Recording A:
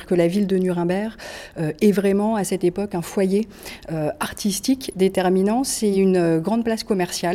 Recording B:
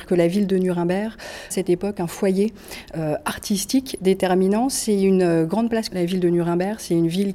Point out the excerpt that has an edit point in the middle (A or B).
B